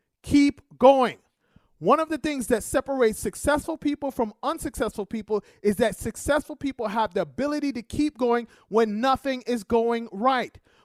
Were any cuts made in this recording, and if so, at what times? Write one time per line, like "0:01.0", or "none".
none